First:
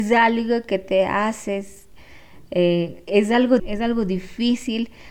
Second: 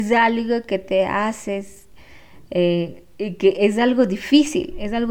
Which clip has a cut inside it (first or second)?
first